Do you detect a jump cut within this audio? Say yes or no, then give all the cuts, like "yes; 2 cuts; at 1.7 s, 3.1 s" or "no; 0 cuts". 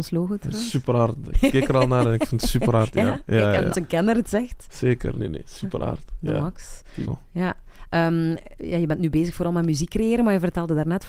yes; 3 cuts; at 3.7 s, 5.2 s, 7.0 s